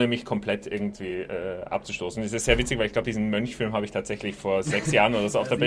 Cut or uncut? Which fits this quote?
uncut